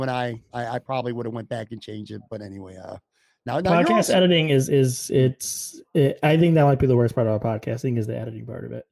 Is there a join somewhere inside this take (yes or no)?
no